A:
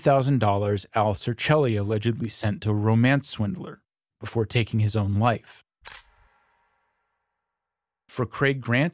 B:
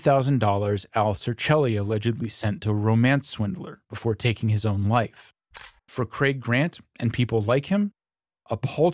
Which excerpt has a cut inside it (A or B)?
B